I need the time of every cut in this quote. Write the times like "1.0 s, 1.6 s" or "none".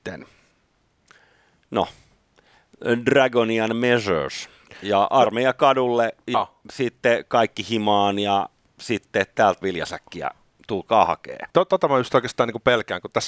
6.3 s, 9.6 s, 11.5 s